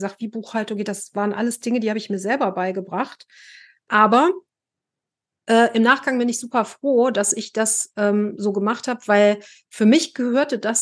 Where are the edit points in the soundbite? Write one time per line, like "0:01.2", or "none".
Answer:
none